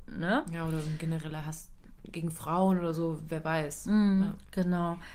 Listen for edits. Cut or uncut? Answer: uncut